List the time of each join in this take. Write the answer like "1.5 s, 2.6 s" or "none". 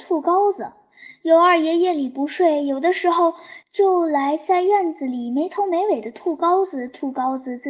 3.6 s